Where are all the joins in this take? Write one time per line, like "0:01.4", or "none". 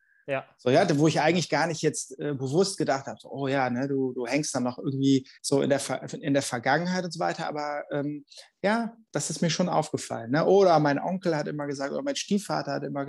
0:05.3